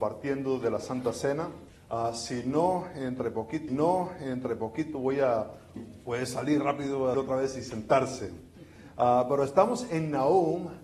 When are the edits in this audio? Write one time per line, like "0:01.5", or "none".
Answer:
0:01.7
0:03.7
0:05.8
0:07.1